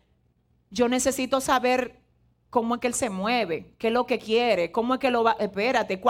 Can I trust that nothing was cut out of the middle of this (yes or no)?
yes